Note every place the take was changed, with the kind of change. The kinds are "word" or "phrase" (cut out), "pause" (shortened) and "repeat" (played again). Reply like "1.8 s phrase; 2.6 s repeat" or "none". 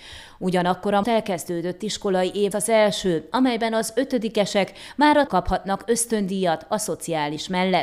1.0 s word; 2.5 s word; 5.3 s phrase